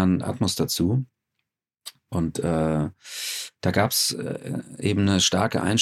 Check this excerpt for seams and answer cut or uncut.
uncut